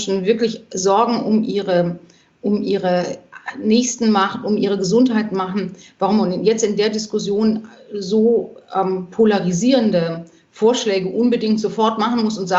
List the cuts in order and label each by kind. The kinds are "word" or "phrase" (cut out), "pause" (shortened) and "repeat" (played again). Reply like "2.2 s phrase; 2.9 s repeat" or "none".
none